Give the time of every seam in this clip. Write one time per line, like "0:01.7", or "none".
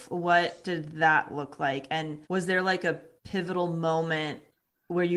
0:02.2

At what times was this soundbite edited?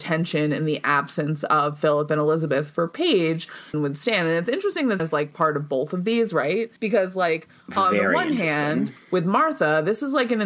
0:03.7
0:05.0
0:06.8

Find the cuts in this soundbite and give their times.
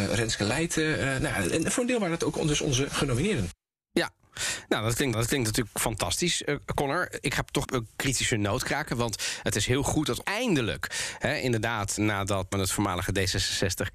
0:05.1
0:07.6
0:10.2
0:12.0
0:12.5

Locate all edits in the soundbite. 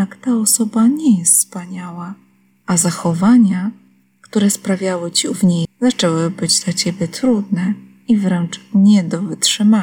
0:05.6

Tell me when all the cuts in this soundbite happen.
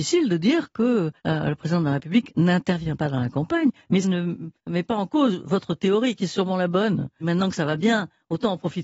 0:01.2
0:04.0
0:04.6
0:07.2

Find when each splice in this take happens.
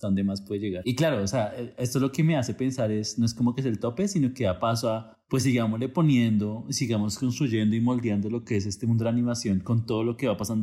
0:05.2

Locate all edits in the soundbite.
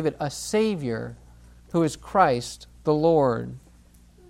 none

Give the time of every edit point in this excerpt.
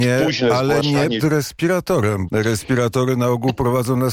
0:01.2
0:02.3

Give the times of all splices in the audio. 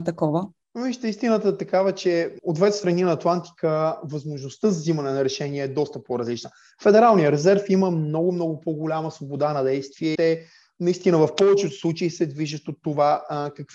0:10.1

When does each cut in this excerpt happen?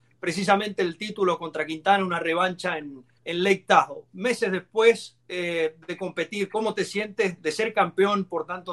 0:03.2
0:05.2
0:07.4

